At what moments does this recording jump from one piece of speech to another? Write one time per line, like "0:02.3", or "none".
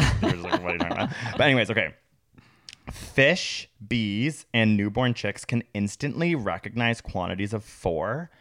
none